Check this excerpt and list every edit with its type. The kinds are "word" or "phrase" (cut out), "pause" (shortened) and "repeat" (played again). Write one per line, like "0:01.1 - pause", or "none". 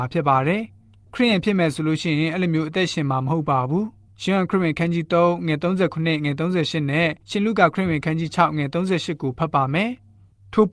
0:07.2 - pause